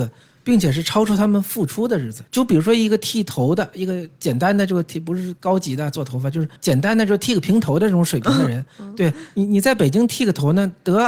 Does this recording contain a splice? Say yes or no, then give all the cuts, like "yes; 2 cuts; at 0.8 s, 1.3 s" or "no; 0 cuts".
yes; 2 cuts; at 2.3 s, 6.6 s